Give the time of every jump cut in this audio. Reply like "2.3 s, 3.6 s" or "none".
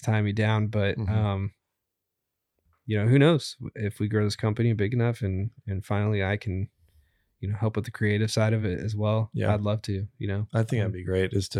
none

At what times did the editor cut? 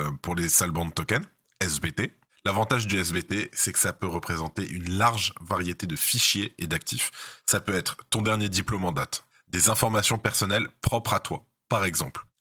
none

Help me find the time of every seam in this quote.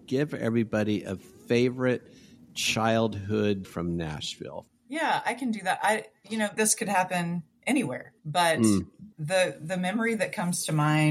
3.6 s, 6.6 s, 8.2 s, 9.1 s

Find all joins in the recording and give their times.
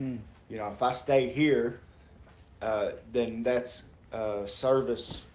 none

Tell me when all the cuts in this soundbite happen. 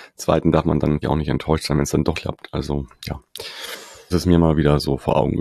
1.0 s, 2.1 s, 4.1 s

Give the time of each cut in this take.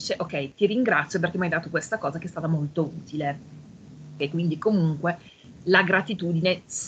none

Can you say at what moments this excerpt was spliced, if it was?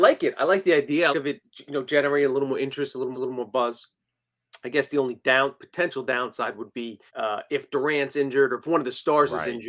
1.1 s, 3.1 s, 7.1 s

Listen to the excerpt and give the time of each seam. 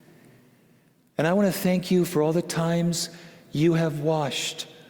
none

